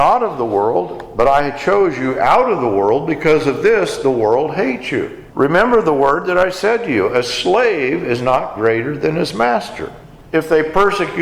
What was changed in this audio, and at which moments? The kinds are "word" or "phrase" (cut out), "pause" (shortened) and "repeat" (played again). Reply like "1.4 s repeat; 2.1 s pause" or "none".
5.3 s pause